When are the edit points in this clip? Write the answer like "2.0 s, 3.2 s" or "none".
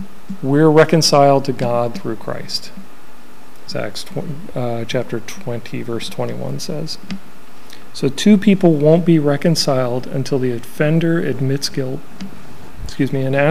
none